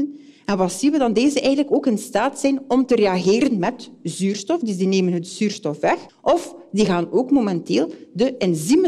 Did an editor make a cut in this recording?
no; 0 cuts

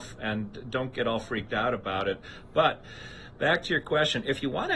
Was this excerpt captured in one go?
yes; 0 cuts

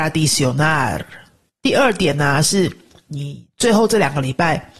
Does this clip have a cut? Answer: yes; 1 cut; at 1.5 s

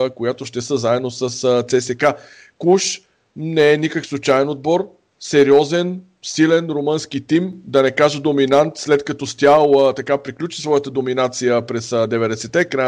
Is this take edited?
no; 0 cuts

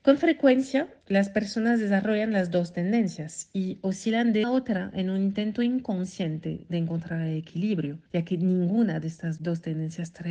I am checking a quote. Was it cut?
yes; 3 cuts; at 4.4 s, 8.1 s, 9.4 s

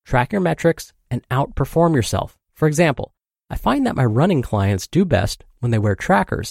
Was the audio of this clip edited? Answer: yes; 1 cut; at 2.4 s

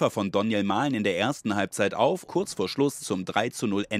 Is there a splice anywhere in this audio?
yes; 2 cuts; at 2.3 s, 3.0 s

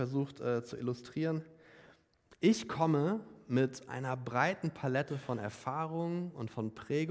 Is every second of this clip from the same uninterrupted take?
yes; 0 cuts

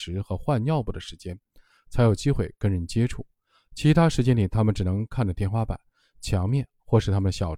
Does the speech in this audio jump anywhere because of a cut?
no; 0 cuts

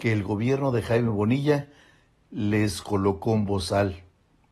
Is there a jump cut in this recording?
no; 0 cuts

